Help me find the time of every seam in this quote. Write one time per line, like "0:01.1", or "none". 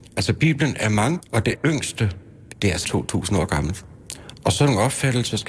0:01.2
0:01.5
0:02.5
0:02.8